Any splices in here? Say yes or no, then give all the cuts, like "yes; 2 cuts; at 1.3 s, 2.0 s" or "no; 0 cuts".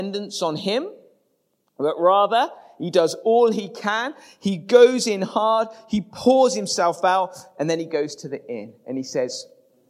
no; 0 cuts